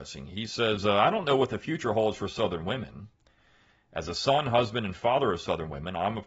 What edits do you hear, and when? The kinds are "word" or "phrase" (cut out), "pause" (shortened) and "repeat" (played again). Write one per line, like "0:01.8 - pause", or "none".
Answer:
none